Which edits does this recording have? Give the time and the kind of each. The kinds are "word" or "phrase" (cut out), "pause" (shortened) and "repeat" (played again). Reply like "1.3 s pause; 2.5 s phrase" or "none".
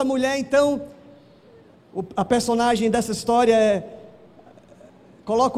none